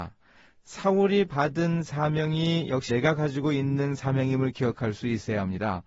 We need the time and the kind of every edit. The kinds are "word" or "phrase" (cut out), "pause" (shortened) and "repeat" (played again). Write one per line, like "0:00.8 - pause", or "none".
0:02.9 - word